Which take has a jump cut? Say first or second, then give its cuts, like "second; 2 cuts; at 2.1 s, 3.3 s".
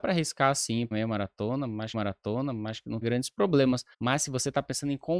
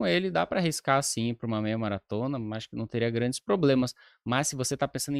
first; 4 cuts; at 0.9 s, 1.9 s, 3.0 s, 3.9 s